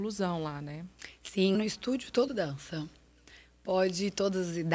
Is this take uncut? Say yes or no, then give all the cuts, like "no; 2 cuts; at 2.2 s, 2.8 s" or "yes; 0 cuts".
no; 2 cuts; at 1.5 s, 2.3 s